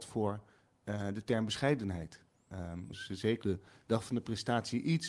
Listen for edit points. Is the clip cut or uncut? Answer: cut